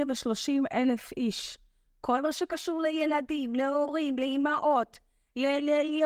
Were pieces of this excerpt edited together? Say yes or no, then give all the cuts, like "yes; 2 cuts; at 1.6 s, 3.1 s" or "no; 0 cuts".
no; 0 cuts